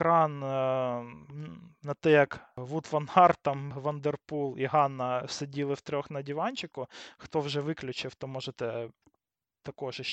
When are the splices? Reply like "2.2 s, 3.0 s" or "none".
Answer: 3.7 s